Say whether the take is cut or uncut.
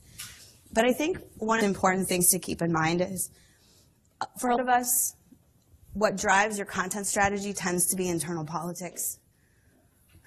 cut